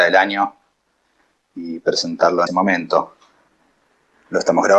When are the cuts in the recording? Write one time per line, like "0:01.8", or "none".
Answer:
0:02.5